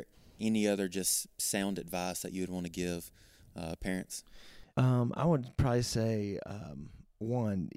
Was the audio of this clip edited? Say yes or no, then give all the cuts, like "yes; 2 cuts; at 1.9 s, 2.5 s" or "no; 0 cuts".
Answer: yes; 1 cut; at 4.7 s